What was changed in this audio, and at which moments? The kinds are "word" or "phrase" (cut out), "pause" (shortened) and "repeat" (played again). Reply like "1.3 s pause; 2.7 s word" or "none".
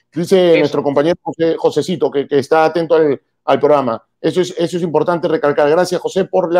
none